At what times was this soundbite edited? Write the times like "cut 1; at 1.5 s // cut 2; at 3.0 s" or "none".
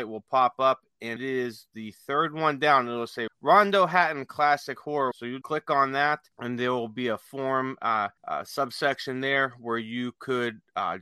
cut 1; at 1.2 s // cut 2; at 3.3 s // cut 3; at 5.1 s // cut 4; at 5.4 s // cut 5; at 6.3 s // cut 6; at 8.2 s

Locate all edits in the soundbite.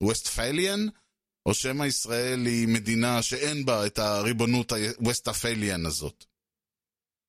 none

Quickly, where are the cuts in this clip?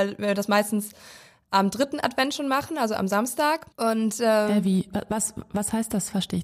cut 1; at 3.7 s

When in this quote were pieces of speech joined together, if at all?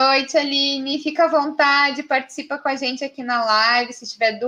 none

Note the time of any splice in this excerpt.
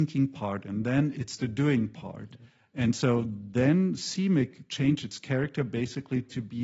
none

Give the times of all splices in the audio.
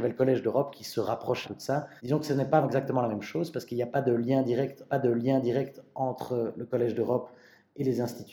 cut 1; at 1.4 s // cut 2; at 2.0 s // cut 3; at 2.6 s // cut 4; at 4.9 s

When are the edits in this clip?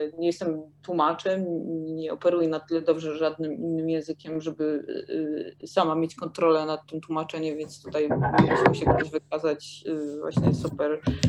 none

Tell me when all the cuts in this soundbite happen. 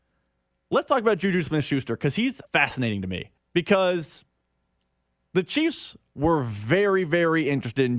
cut 1; at 2.5 s // cut 2; at 3.4 s

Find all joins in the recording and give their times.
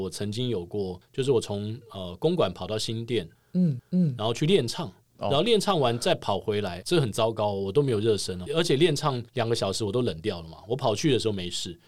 cut 1; at 3.8 s // cut 2; at 6.8 s // cut 3; at 8.5 s // cut 4; at 9.3 s

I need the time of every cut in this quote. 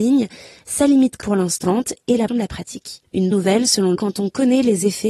cut 1; at 1.2 s // cut 2; at 1.6 s // cut 3; at 2.3 s // cut 4; at 3.3 s // cut 5; at 4.0 s

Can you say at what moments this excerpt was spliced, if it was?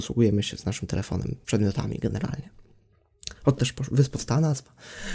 cut 1; at 1.4 s // cut 2; at 3.6 s

